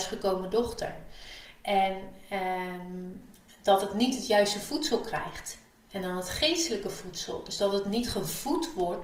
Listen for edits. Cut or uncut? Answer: uncut